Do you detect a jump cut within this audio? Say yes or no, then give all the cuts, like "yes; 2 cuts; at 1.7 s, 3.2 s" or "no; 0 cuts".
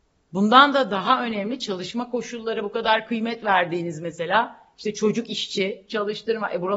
no; 0 cuts